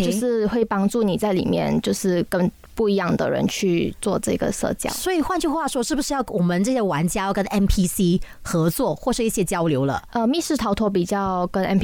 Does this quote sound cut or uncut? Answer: uncut